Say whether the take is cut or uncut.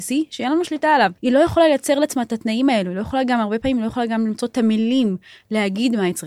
cut